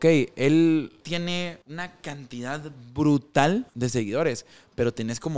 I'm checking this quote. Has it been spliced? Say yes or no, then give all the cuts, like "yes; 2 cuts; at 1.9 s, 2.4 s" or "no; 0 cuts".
yes; 3 cuts; at 1.0 s, 1.6 s, 3.7 s